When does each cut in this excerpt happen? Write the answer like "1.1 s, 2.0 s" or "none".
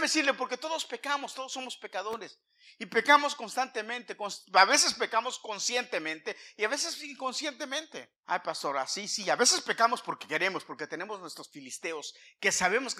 8.2 s